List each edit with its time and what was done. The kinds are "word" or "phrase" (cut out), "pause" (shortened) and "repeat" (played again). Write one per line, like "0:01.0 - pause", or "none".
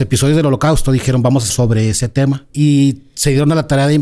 0:01.5 - word
0:02.5 - pause